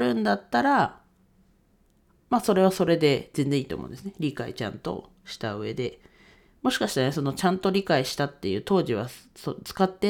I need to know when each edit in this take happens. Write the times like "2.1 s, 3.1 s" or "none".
none